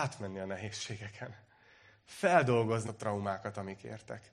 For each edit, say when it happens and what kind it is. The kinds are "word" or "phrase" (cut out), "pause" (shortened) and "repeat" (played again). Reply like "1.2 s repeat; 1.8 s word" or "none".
2.9 s word